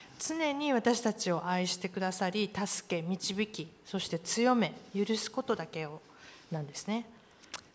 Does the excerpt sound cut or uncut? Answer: uncut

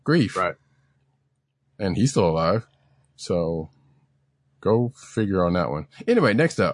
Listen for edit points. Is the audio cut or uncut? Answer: uncut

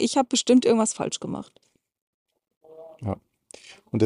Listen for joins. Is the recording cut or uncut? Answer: uncut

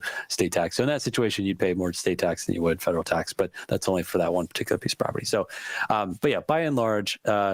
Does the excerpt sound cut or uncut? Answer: uncut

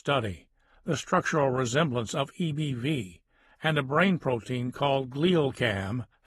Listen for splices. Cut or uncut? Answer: uncut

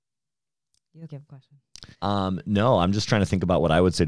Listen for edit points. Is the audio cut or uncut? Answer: cut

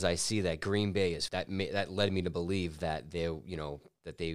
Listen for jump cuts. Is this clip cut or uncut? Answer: cut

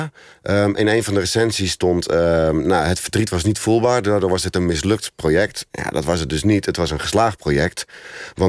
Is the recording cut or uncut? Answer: uncut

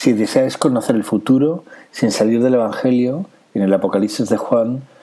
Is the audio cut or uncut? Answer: uncut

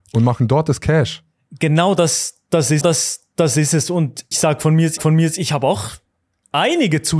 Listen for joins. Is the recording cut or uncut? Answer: cut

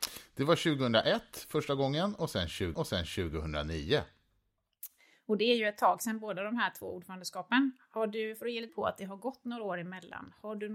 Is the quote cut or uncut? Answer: cut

